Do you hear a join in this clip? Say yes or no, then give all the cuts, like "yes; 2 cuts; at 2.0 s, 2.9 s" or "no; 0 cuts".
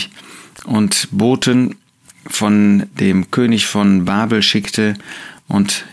no; 0 cuts